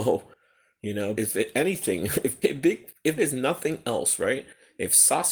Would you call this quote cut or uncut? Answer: cut